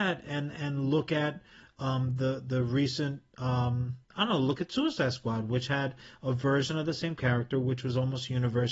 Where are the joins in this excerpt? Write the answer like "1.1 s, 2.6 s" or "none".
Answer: 4.0 s